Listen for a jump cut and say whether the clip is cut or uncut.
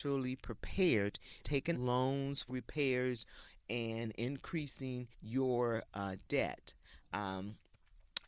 cut